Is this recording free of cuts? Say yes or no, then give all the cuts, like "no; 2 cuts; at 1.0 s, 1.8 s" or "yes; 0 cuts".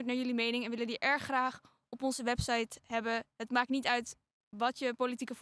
yes; 0 cuts